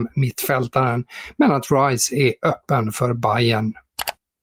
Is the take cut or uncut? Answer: uncut